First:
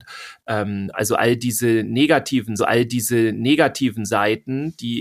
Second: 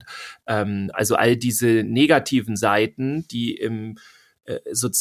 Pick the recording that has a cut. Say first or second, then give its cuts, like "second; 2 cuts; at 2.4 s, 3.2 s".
first; 1 cut; at 2.6 s